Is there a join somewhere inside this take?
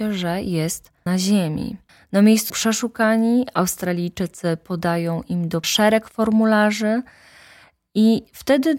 yes; 4 cuts; at 1.1 s, 1.9 s, 2.5 s, 5.6 s

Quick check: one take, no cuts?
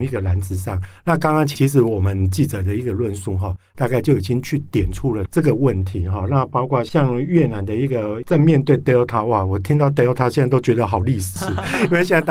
yes; 0 cuts

